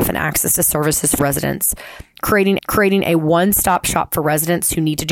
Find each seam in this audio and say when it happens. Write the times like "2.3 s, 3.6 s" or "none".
1.2 s, 2.6 s